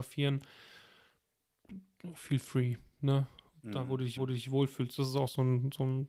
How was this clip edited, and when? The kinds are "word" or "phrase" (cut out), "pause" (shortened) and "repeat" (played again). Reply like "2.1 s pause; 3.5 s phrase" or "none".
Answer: 4.2 s repeat